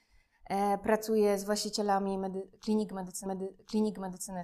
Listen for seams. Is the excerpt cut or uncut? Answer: cut